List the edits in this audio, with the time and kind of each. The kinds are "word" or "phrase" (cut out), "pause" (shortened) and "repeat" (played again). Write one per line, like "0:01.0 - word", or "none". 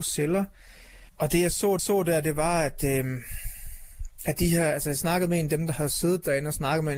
0:01.1 - pause
0:01.8 - repeat